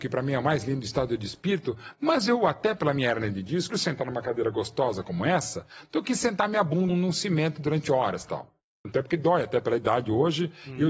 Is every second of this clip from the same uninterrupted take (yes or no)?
no